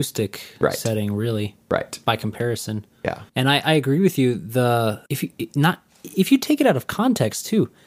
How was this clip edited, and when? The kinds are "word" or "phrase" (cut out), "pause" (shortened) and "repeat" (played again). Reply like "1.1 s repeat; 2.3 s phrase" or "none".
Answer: 3.3 s pause; 5.1 s pause

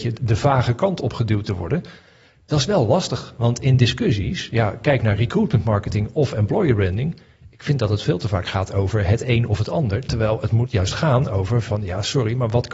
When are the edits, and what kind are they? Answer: none

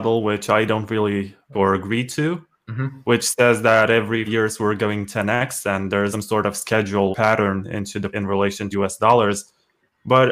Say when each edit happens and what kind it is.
1.5 s word; 4.3 s word; 6.1 s word; 7.1 s word; 8.1 s word; 8.7 s word

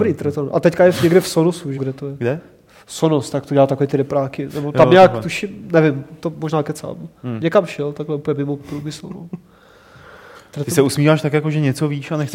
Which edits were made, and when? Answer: 1.8 s word

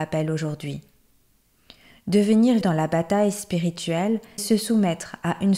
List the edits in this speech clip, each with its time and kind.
2.6 s word; 4.4 s word

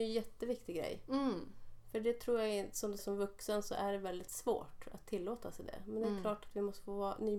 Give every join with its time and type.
3.0 s word

